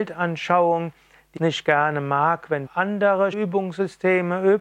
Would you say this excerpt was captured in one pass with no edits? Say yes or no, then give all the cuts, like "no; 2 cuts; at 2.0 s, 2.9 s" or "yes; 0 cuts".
no; 3 cuts; at 1.4 s, 2.7 s, 3.3 s